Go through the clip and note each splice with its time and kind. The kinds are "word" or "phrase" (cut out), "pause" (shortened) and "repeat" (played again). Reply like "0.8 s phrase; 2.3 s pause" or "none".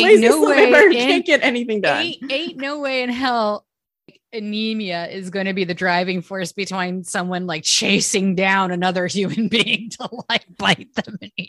none

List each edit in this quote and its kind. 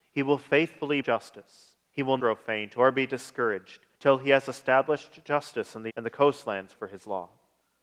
1.0 s phrase; 1.9 s pause; 2.2 s word; 3.9 s pause; 5.9 s word; 6.8 s word

